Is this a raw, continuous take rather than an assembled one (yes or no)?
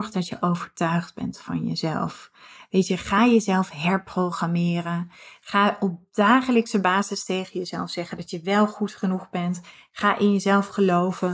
yes